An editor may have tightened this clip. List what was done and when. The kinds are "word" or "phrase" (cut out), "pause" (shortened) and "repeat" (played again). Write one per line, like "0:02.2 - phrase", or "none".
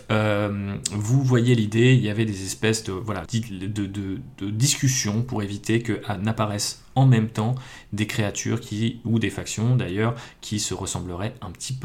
0:03.3 - word